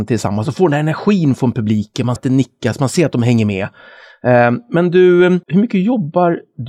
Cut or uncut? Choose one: cut